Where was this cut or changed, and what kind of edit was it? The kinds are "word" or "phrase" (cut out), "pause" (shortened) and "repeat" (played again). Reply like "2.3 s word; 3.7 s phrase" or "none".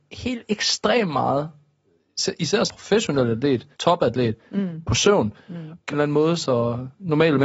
2.7 s word; 3.7 s pause; 5.9 s phrase